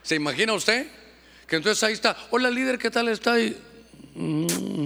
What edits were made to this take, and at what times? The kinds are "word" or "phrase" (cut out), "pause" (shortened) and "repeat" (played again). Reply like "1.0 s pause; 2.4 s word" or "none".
none